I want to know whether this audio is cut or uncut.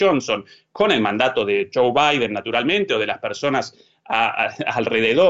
uncut